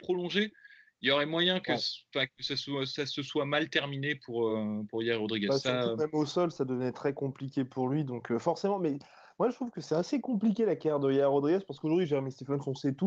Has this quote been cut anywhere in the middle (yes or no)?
no